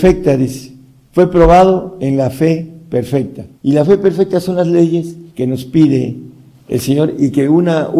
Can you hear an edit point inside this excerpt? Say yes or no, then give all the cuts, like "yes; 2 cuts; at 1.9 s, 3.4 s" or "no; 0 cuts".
yes; 2 cuts; at 3.5 s, 5.3 s